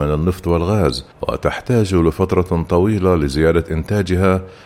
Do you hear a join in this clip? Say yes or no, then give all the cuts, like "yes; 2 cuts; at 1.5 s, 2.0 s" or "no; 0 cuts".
yes; 1 cut; at 1.1 s